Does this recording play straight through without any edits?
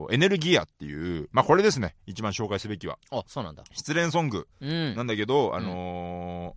no; 2 cuts; at 1.3 s, 4.5 s

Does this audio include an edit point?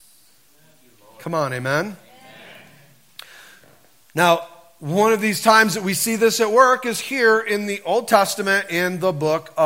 no; 0 cuts

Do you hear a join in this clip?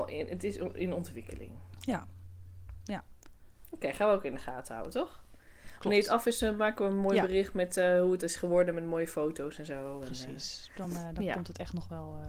no; 0 cuts

